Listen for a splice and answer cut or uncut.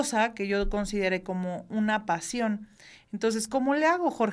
uncut